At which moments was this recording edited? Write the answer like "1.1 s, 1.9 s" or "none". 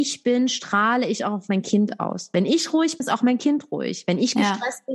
3.0 s